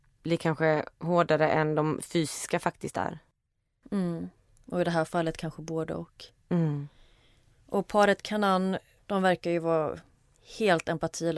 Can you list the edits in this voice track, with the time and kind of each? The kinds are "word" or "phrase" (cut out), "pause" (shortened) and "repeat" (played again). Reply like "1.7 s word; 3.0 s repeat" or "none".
0.9 s pause